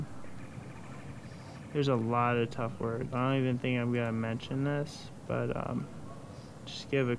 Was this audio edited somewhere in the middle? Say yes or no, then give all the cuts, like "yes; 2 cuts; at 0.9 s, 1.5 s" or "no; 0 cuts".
yes; 1 cut; at 3.1 s